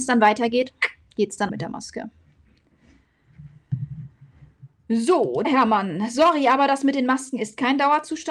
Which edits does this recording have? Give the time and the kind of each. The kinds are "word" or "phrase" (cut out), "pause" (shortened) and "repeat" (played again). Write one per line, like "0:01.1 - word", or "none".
0:01.5 - phrase
0:05.4 - word